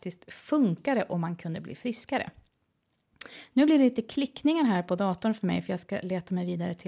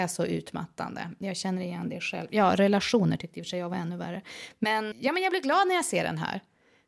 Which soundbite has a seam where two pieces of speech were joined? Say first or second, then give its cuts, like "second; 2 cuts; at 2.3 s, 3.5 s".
second; 1 cut; at 4.9 s